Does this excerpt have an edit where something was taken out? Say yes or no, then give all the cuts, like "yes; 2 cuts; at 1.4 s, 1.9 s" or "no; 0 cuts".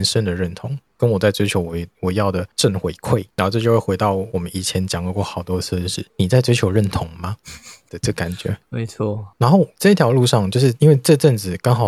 yes; 1 cut; at 6.1 s